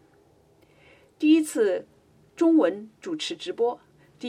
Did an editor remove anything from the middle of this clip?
no; 0 cuts

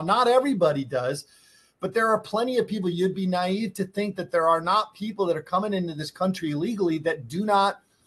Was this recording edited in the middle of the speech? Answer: no; 0 cuts

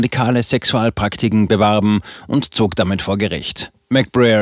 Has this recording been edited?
no; 0 cuts

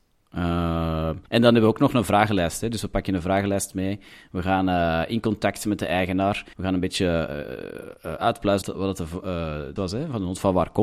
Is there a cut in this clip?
yes; 4 cuts; at 1.3 s, 6.5 s, 8.6 s, 9.8 s

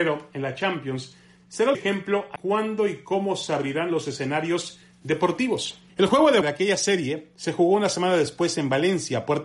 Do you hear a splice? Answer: yes; 4 cuts; at 1.7 s, 2.4 s, 5.9 s, 6.4 s

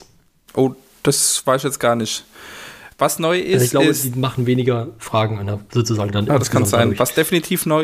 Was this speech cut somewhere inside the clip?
no; 0 cuts

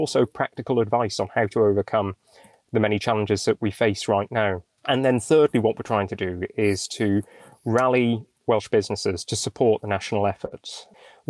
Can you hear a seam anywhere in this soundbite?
no; 0 cuts

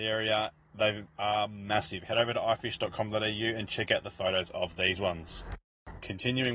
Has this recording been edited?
no; 0 cuts

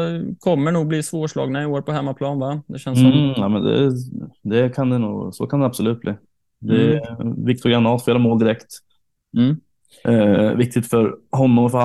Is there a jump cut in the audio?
no; 0 cuts

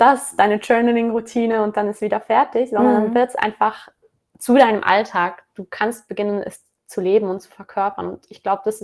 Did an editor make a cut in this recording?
no; 0 cuts

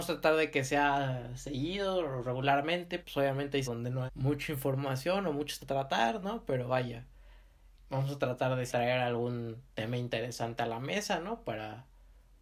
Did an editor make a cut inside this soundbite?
yes; 6 cuts; at 3.0 s, 3.6 s, 4.1 s, 5.6 s, 7.8 s, 8.7 s

